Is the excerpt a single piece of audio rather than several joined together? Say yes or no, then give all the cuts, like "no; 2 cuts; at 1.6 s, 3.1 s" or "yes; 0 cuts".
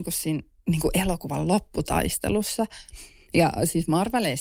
yes; 0 cuts